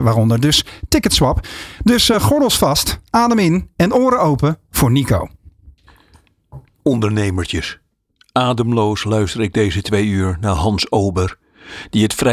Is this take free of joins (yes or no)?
yes